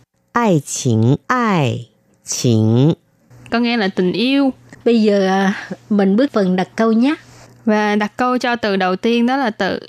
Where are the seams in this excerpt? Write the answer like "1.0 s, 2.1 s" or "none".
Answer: 1.2 s, 3.5 s, 4.8 s, 6.3 s